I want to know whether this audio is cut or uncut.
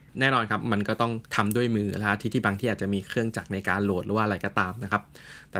cut